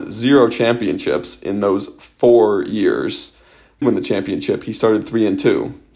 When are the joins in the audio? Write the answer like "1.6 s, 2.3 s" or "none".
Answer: 3.8 s